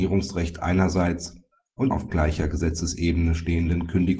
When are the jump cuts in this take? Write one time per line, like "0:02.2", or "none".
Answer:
0:01.9

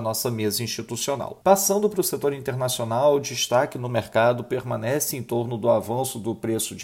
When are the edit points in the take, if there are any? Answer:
0:01.4

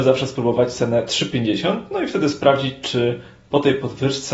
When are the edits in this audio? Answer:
none

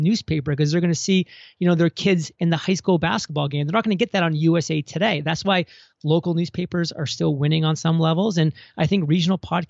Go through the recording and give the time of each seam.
none

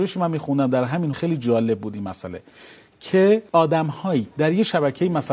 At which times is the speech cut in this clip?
0:01.1
0:03.5
0:04.3

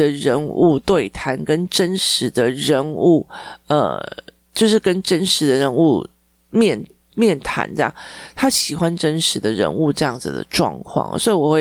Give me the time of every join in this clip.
none

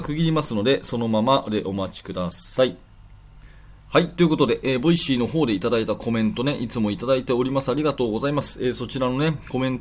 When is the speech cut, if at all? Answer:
0:03.8

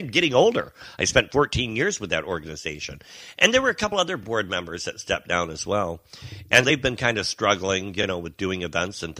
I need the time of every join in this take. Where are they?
0:06.6

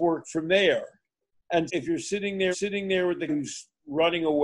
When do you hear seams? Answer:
0:01.7
0:02.5
0:03.3

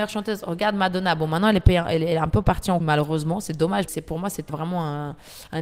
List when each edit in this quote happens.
0:02.8
0:03.9
0:04.5

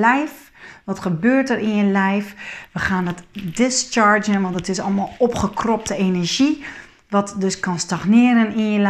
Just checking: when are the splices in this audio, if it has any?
none

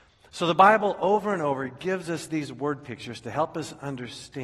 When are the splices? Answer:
none

